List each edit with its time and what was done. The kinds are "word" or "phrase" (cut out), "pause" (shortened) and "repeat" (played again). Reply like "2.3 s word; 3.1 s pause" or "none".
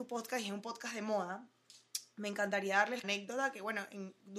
3.0 s phrase

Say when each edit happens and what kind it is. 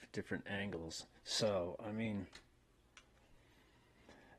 1.2 s pause

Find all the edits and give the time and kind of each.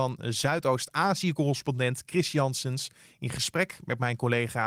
none

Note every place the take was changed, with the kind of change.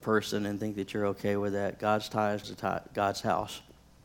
2.4 s word

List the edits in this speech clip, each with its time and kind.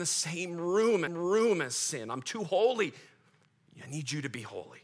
1.1 s repeat

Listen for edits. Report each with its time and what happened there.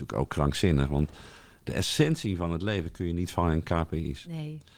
none

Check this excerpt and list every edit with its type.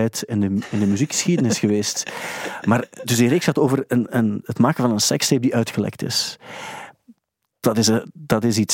none

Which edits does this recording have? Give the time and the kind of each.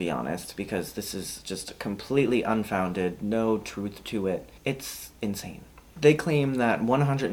4.6 s pause

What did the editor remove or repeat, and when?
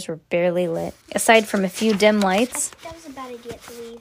1.0 s pause

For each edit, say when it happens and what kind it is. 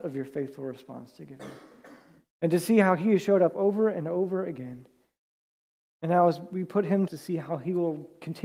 7.1 s phrase

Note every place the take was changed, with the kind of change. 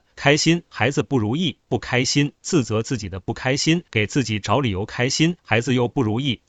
3.9 s pause; 5.4 s pause

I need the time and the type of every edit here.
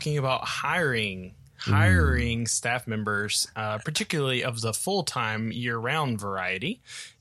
none

